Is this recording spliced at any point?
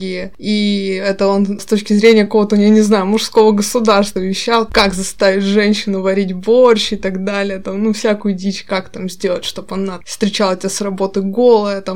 no; 0 cuts

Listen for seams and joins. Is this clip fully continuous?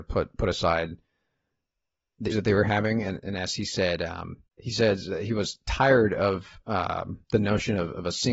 no; 3 cuts; at 2.3 s, 4.5 s, 7.2 s

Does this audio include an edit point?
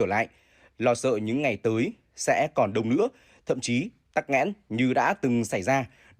no; 0 cuts

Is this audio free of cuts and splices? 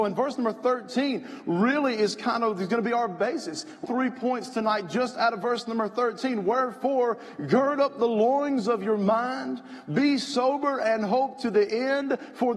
no; 1 cut; at 3.8 s

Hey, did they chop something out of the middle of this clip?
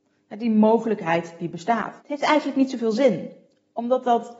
yes; 1 cut; at 2.0 s

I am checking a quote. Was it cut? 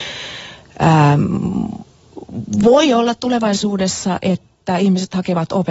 no; 0 cuts

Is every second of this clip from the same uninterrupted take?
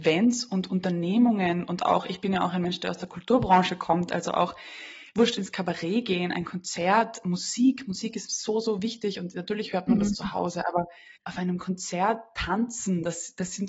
no; 1 cut; at 11.2 s

